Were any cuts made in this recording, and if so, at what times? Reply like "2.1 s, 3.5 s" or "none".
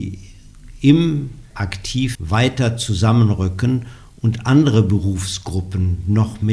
1.5 s, 2.1 s